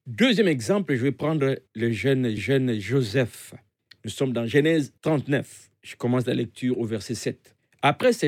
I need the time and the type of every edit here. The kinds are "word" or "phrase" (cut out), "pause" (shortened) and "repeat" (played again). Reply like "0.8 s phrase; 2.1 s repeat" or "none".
1.7 s pause; 2.4 s repeat; 5.0 s pause